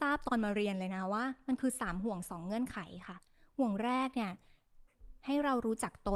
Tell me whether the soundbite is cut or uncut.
uncut